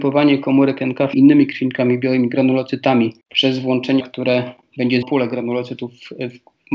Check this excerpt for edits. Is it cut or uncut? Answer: cut